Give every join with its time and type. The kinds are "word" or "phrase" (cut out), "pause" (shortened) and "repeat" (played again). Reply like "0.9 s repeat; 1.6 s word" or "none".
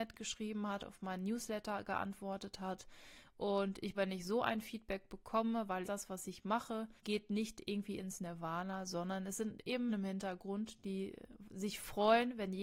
3.9 s phrase; 5.8 s phrase; 7.0 s pause; 9.9 s word